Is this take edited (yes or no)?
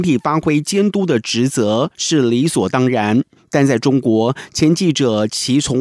no